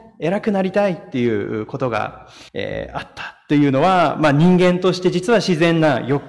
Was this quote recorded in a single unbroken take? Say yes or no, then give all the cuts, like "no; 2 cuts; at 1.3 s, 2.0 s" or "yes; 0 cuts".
no; 1 cut; at 2.5 s